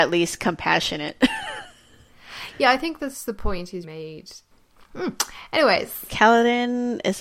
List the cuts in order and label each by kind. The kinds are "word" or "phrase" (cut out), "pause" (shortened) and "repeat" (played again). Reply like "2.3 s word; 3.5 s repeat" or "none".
3.8 s word